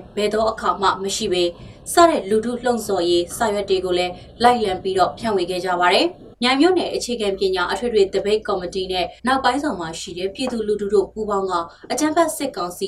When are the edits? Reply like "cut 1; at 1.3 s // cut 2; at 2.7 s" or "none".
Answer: cut 1; at 6.3 s // cut 2; at 9.2 s